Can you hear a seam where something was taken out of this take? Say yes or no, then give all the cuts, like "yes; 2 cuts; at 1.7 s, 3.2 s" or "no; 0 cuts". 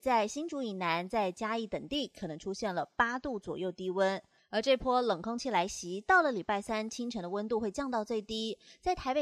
yes; 1 cut; at 4.4 s